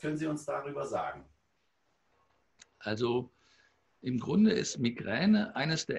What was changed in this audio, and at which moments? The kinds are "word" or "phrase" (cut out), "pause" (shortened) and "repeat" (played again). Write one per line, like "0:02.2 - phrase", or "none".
none